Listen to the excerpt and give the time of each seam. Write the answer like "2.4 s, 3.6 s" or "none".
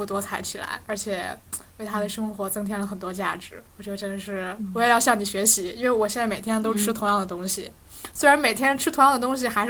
3.7 s

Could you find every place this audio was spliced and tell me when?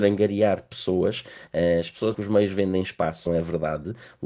2.1 s, 3.3 s

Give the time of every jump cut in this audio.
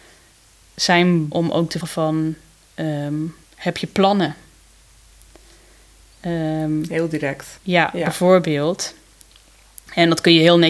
1.3 s, 1.8 s, 3.4 s, 7.6 s

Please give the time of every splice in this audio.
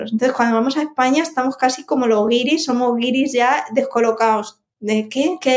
none

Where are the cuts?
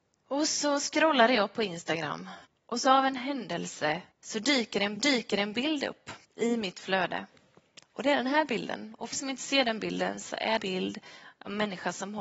2.4 s, 4.1 s, 5.0 s, 6.2 s, 7.8 s, 9.1 s, 10.6 s

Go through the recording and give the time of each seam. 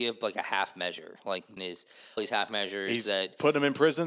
1.6 s, 2.2 s

